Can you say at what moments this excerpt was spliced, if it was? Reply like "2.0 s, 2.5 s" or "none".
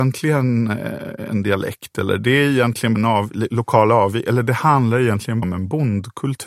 3.0 s, 5.4 s